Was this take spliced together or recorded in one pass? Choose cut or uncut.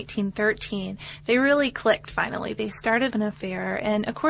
cut